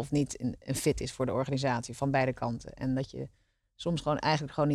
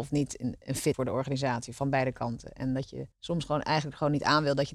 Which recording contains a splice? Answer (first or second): second